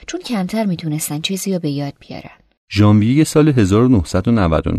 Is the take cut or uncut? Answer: uncut